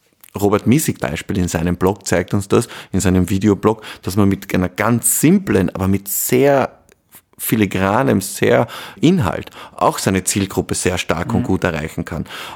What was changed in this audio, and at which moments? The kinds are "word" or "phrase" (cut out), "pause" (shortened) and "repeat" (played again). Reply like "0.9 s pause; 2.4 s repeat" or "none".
1.0 s word; 5.7 s word; 9.0 s word